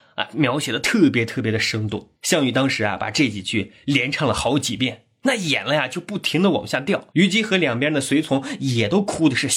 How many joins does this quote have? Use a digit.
2